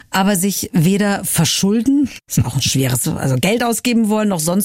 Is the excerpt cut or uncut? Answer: cut